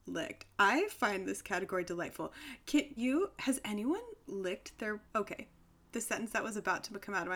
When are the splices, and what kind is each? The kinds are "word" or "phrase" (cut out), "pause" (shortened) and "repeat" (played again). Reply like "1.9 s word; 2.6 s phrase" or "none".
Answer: 3.0 s word; 4.3 s word; 5.0 s pause